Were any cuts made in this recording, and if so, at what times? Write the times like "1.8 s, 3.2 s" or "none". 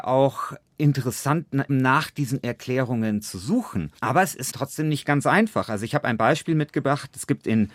1.7 s, 4.0 s, 4.5 s